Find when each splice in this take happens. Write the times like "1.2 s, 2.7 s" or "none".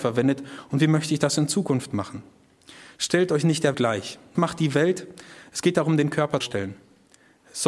3.7 s, 4.4 s, 6.4 s